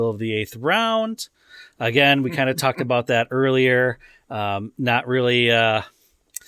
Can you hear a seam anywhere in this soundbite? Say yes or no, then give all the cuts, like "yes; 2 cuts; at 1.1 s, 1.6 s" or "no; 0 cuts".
no; 0 cuts